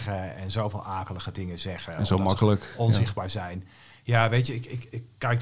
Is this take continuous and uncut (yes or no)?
yes